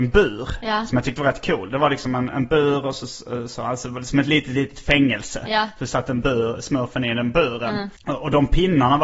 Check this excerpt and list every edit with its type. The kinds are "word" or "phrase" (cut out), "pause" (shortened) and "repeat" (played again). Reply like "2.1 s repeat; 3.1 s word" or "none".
8.0 s pause